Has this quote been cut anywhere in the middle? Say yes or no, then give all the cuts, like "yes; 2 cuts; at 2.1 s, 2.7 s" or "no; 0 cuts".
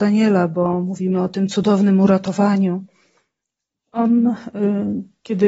no; 0 cuts